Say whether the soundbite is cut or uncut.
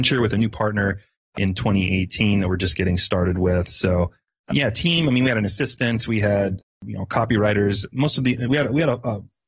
uncut